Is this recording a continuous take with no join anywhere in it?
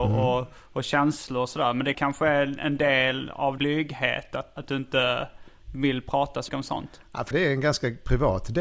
no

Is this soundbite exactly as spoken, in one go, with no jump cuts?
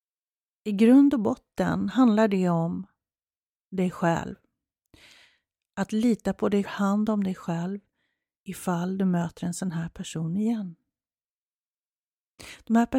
no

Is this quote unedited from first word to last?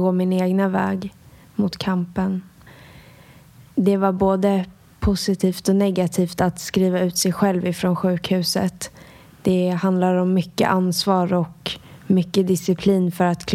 yes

